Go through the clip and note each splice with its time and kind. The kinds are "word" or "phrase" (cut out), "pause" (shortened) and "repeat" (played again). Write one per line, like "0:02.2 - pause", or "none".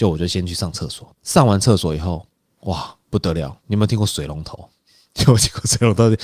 0:01.1 - pause
0:03.0 - pause
0:03.6 - pause